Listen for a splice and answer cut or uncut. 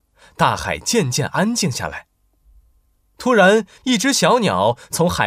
uncut